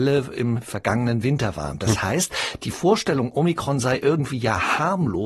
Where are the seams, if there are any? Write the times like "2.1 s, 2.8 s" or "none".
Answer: none